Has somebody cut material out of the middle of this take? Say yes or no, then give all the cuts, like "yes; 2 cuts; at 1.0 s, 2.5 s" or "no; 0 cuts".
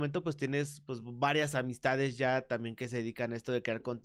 no; 0 cuts